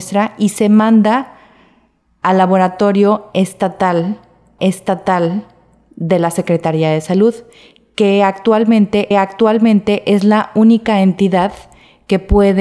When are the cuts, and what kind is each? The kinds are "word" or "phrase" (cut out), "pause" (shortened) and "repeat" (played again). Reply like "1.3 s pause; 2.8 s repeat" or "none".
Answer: 4.6 s repeat; 9.1 s repeat